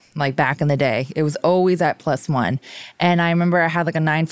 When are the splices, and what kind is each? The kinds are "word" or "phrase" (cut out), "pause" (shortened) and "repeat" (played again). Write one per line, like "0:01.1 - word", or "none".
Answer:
none